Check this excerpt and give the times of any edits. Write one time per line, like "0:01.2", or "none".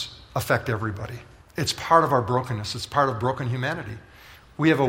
0:01.4